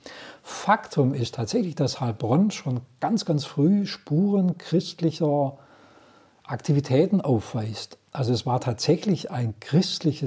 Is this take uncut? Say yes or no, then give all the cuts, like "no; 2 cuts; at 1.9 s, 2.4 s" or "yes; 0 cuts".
yes; 0 cuts